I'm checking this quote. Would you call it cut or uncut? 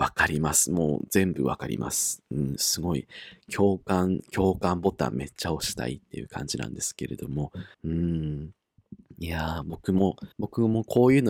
cut